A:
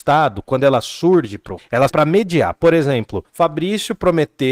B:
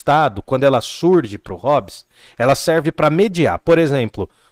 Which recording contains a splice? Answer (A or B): A